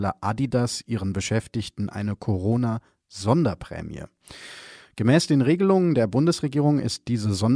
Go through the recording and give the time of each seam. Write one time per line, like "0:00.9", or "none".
none